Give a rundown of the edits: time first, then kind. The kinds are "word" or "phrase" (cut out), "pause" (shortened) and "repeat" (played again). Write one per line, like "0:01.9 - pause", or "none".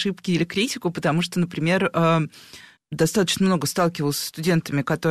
0:02.8 - word